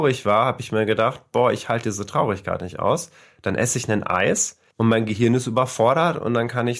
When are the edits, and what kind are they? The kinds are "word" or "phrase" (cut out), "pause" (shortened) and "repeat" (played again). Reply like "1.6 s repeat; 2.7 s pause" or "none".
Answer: 4.7 s pause